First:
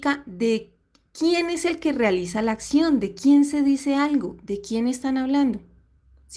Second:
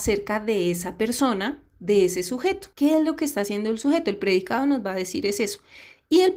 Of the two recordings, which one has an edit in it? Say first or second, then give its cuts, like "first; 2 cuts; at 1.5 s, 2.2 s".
second; 1 cut; at 2.7 s